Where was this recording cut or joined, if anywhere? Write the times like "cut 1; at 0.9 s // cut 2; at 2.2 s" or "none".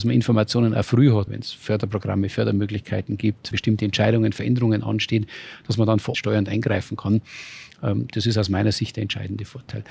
cut 1; at 1.3 s // cut 2; at 3.5 s // cut 3; at 6.1 s